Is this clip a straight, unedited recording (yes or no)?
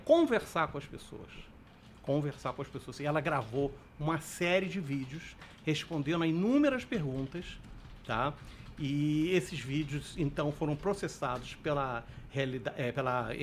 yes